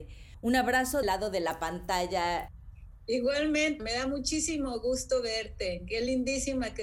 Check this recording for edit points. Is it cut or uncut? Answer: cut